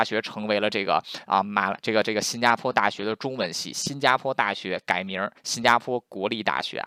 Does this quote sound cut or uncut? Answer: cut